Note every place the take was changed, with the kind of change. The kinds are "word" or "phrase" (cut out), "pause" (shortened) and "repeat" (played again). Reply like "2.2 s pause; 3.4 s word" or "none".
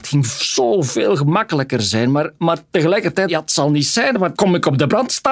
3.3 s phrase; 4.3 s word